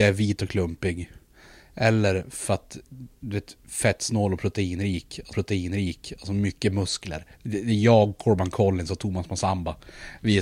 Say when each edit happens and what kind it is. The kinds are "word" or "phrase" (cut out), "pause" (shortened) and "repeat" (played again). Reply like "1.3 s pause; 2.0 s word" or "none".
5.3 s repeat; 7.3 s pause

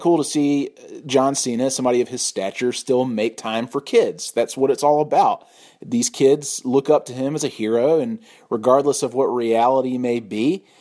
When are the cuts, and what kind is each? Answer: none

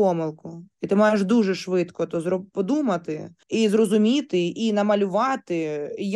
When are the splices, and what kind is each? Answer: 3.4 s pause

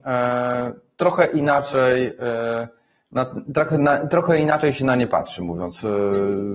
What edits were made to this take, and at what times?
none

